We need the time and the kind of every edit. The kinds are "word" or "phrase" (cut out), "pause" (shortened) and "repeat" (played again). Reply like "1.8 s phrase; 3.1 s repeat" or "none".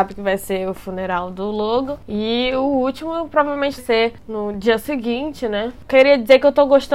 3.8 s phrase